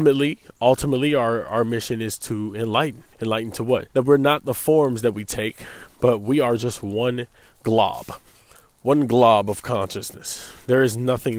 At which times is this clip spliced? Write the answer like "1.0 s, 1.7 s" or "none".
3.1 s, 3.9 s, 8.3 s